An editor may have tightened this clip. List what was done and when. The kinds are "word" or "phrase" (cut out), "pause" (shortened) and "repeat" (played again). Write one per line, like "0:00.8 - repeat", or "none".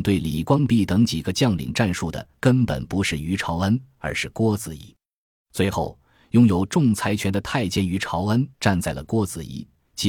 0:08.5 - pause